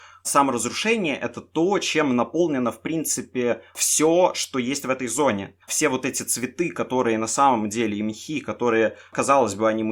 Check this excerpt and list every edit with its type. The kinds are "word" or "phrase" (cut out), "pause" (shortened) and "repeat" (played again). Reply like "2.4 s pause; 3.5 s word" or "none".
5.6 s pause